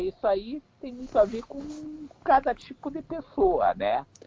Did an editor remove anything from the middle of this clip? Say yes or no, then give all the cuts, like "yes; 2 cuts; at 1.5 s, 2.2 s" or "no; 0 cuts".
no; 0 cuts